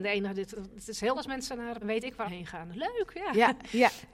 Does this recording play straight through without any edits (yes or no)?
no